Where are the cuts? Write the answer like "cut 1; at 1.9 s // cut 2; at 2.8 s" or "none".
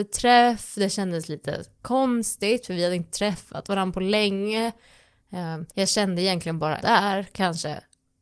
cut 1; at 5.7 s // cut 2; at 6.8 s